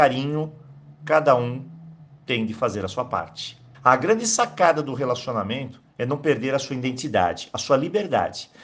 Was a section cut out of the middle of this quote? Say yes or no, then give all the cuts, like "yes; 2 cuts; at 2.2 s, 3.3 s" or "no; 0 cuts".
yes; 2 cuts; at 3.7 s, 5.9 s